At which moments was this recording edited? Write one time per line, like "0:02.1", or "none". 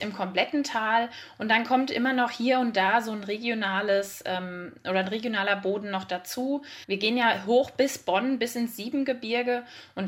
0:06.8